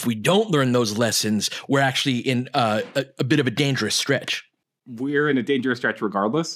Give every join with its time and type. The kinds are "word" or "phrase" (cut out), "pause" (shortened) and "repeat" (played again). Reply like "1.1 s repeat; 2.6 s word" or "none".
none